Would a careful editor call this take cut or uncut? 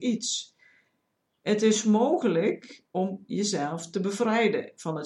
cut